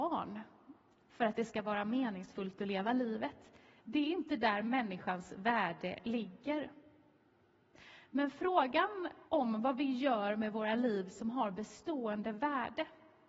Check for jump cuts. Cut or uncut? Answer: cut